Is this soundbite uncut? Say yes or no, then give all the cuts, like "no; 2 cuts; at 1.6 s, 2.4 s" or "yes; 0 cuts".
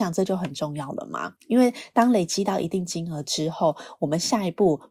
no; 1 cut; at 1.4 s